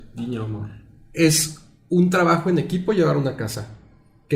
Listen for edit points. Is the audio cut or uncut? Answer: uncut